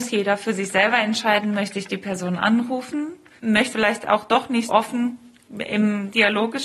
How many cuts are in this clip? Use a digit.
3